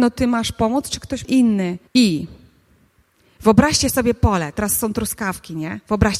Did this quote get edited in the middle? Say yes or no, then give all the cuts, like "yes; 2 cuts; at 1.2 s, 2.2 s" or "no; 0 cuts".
yes; 2 cuts; at 1.2 s, 1.9 s